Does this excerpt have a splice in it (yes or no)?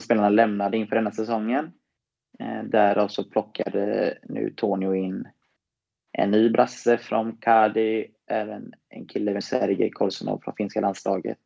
yes